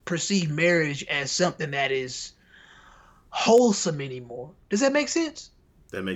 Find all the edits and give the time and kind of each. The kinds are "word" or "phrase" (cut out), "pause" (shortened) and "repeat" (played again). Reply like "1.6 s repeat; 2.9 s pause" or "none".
none